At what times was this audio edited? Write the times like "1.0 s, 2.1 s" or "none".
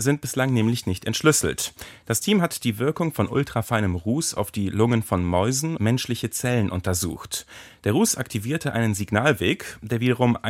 5.8 s